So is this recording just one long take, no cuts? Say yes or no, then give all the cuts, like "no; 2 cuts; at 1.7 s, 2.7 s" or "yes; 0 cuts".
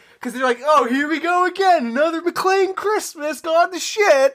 yes; 0 cuts